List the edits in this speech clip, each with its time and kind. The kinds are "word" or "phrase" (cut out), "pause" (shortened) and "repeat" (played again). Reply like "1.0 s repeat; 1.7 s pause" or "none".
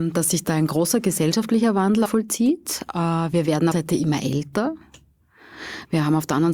2.1 s word; 3.7 s phrase